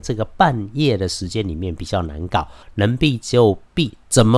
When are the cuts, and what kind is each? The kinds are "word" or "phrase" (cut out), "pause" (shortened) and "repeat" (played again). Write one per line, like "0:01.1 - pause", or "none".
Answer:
none